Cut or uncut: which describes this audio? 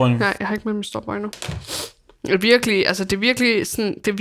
uncut